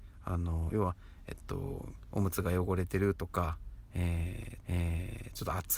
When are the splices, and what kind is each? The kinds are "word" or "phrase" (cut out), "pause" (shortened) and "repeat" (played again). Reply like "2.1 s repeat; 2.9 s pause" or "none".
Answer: 4.6 s repeat